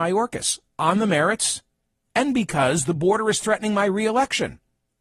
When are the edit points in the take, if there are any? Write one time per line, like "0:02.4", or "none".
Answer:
none